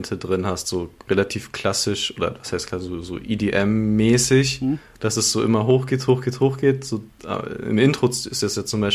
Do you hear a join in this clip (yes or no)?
yes